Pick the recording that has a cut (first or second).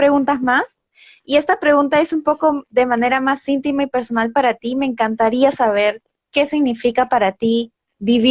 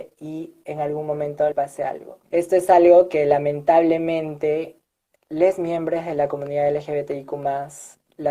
second